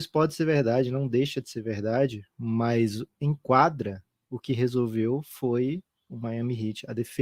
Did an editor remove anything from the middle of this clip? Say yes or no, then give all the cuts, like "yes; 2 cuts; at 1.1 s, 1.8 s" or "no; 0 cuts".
no; 0 cuts